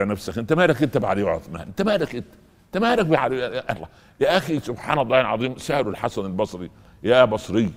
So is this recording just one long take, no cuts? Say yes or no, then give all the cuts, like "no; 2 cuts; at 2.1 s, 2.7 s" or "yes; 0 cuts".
yes; 0 cuts